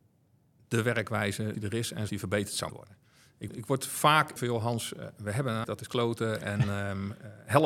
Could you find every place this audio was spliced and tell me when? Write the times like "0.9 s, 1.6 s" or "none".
1.5 s, 2.1 s, 2.7 s, 3.5 s, 4.4 s, 5.6 s